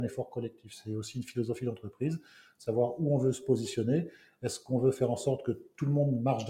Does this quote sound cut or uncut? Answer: uncut